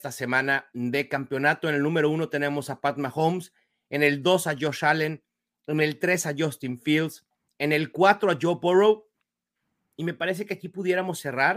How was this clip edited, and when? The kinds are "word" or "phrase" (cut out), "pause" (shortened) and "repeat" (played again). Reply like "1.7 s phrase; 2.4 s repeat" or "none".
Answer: none

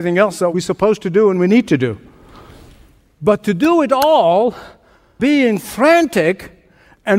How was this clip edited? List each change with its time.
5.2 s word

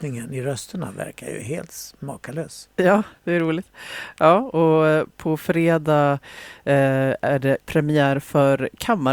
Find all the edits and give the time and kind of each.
3.2 s pause; 7.6 s pause

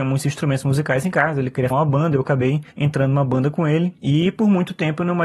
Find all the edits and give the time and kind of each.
1.7 s word; 2.7 s pause; 4.0 s pause

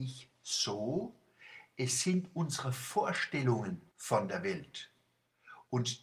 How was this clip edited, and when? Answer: 3.9 s pause

